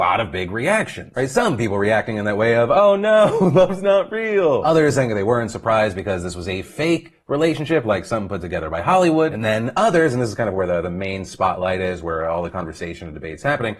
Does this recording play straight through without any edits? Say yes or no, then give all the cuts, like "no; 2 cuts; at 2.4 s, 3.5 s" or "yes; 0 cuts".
yes; 0 cuts